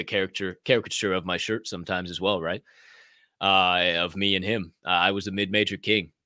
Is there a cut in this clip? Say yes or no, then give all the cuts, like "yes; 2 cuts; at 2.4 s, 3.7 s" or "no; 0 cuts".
no; 0 cuts